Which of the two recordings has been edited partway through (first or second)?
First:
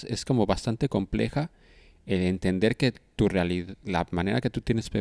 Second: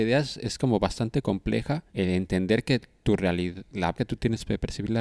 second